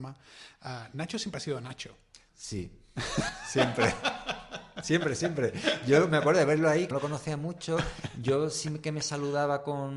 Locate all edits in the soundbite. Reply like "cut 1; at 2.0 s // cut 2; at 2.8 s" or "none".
cut 1; at 6.9 s